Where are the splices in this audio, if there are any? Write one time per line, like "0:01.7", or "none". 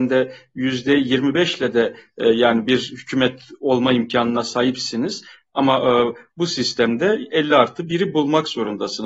none